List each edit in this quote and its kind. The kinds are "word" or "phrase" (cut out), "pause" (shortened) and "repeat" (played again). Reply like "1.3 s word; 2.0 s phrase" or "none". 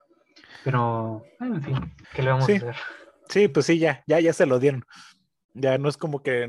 2.0 s pause

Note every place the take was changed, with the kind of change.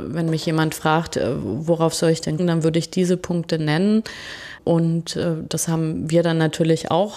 2.4 s word

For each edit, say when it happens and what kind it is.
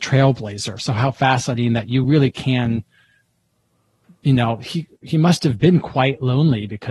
none

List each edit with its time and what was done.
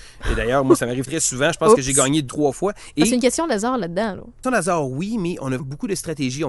1.1 s word; 2.3 s word; 4.4 s phrase; 5.6 s word

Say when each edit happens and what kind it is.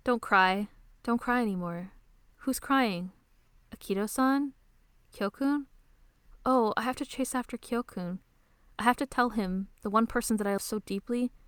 10.6 s word

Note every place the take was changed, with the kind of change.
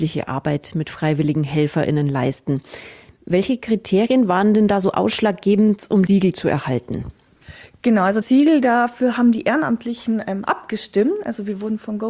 6.1 s word; 8.2 s word

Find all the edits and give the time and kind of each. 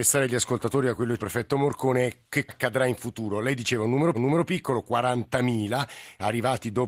1.2 s phrase; 2.5 s word; 4.1 s repeat

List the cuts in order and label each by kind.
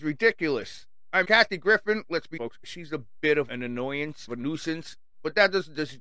1.2 s phrase; 2.4 s word; 3.5 s word; 4.3 s word

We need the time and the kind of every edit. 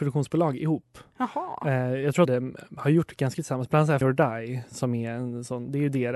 2.3 s word; 3.3 s word; 4.0 s word

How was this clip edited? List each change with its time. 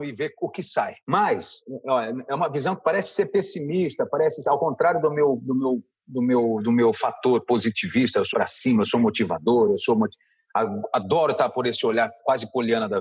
1.0 s pause; 8.3 s word

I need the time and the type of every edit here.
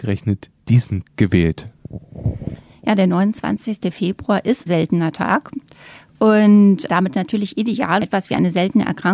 1.1 s word; 4.7 s word; 6.9 s word; 8.0 s word

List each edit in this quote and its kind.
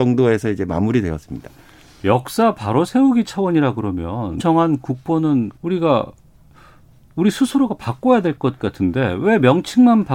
4.4 s word; 5.6 s pause

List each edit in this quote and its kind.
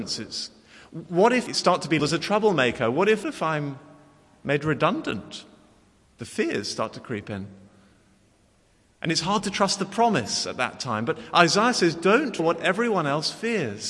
1.5 s word; 2.0 s word; 3.2 s phrase; 12.4 s word

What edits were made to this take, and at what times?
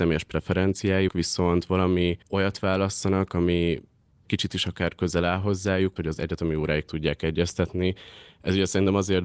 1.1 s word; 2.2 s pause; 4.2 s word; 6.0 s phrase; 6.9 s word

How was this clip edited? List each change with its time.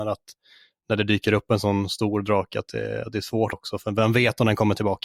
3.5 s phrase

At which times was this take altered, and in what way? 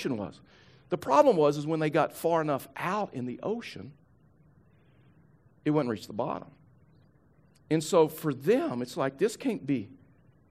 none

